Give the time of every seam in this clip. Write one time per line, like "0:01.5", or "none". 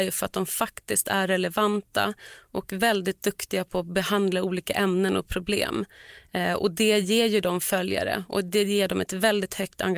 none